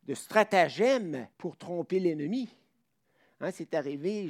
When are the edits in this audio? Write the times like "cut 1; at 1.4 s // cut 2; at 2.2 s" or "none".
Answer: cut 1; at 1.3 s